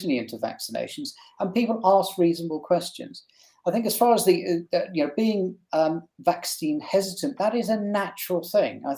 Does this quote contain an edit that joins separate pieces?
no; 0 cuts

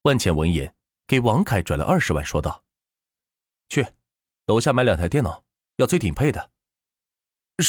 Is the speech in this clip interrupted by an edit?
no; 0 cuts

